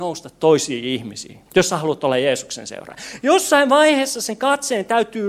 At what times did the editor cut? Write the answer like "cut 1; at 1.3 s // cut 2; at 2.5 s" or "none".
cut 1; at 1.5 s